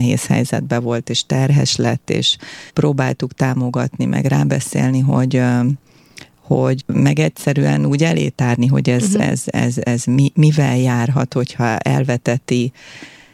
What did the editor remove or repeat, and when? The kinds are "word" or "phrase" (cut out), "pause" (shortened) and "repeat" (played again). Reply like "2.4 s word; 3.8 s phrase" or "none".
2.7 s pause; 6.8 s word; 9.4 s word

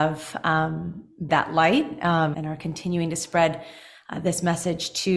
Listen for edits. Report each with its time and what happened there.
1.3 s word; 2.3 s word

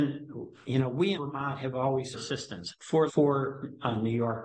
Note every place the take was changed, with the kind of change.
1.1 s word; 2.1 s phrase; 3.1 s word

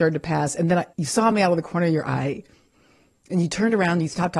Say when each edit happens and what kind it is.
none

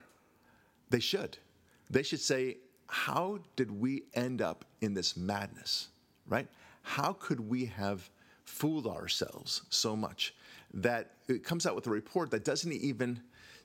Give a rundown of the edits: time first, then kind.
none

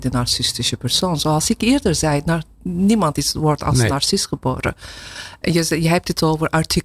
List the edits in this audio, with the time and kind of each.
none

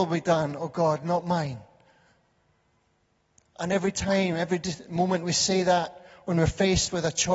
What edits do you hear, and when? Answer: none

